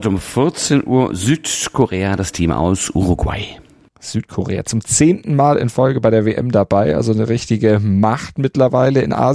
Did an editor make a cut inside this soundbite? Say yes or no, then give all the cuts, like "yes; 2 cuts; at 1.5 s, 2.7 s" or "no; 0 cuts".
no; 0 cuts